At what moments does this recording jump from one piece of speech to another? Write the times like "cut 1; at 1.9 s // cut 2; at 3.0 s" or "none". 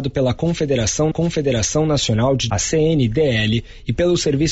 cut 1; at 1.1 s // cut 2; at 2.5 s